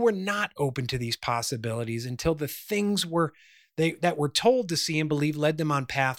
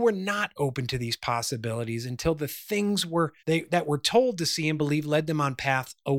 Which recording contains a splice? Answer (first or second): second